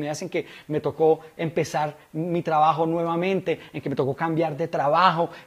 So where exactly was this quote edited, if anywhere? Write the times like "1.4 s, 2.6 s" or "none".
none